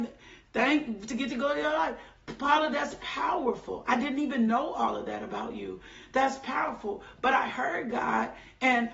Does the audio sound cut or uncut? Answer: uncut